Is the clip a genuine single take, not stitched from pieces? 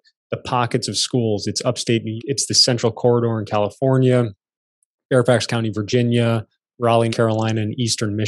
no; 2 cuts; at 2.2 s, 7.1 s

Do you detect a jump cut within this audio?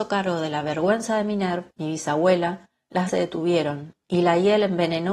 yes; 2 cuts; at 1.7 s, 3.1 s

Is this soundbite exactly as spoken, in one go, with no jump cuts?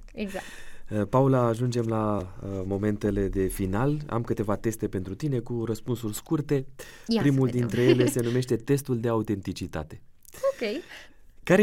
yes; 0 cuts

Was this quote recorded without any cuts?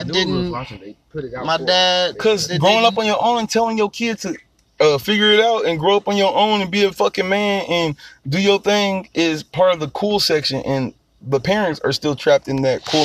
yes; 0 cuts

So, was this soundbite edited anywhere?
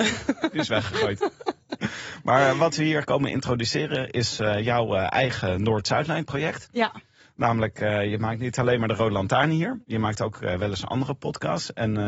no; 0 cuts

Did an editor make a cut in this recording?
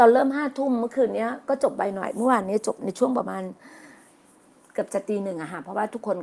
no; 0 cuts

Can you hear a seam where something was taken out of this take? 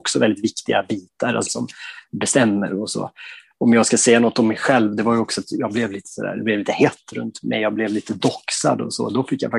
yes; 1 cut; at 1.5 s

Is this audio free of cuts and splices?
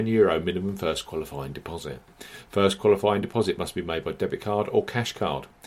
yes; 0 cuts

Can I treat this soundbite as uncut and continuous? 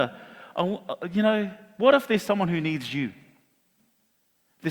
yes; 0 cuts

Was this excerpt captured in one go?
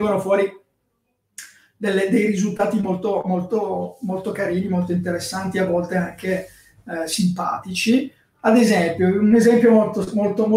yes; 0 cuts

